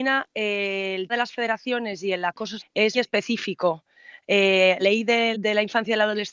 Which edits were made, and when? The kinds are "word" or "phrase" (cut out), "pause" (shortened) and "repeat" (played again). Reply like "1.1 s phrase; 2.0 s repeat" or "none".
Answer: 1.1 s word; 2.6 s word; 2.9 s word; 4.8 s word; 5.3 s word